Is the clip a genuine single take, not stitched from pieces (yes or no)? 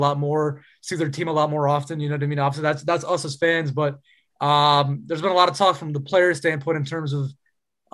yes